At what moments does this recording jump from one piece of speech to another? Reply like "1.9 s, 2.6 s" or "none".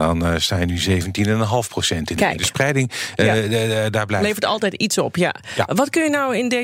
none